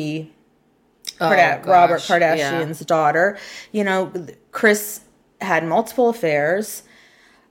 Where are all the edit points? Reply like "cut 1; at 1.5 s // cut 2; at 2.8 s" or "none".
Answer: none